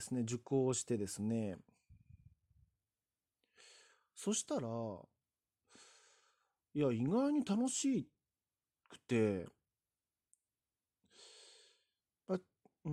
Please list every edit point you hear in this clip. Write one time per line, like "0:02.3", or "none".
none